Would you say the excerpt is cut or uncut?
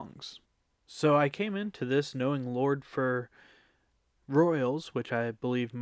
uncut